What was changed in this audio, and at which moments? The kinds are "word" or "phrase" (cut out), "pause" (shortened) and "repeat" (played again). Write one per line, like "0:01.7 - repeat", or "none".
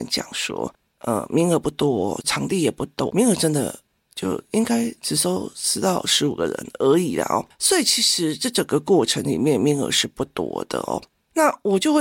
0:02.2 - word
0:03.1 - word